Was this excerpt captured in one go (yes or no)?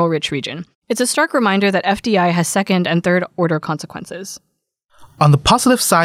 yes